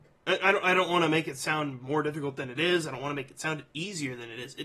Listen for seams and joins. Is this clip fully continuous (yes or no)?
yes